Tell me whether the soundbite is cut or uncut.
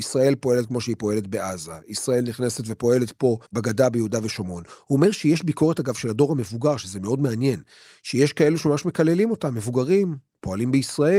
cut